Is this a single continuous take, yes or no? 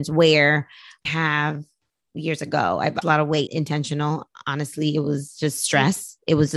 no